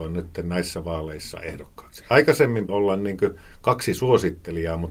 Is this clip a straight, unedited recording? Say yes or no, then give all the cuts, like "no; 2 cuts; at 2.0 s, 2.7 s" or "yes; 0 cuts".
no; 1 cut; at 2.7 s